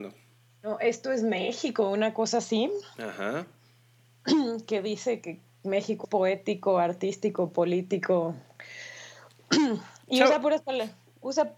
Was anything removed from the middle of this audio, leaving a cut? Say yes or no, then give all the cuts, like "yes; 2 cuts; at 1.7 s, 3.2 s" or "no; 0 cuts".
yes; 2 cuts; at 5.2 s, 6.0 s